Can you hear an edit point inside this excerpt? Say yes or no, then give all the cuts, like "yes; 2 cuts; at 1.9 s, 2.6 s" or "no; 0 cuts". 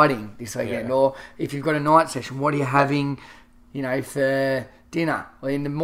no; 0 cuts